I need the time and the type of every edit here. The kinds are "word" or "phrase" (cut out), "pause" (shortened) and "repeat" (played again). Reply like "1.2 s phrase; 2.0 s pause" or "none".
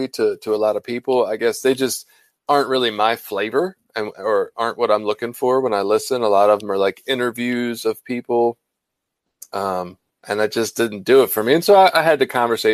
none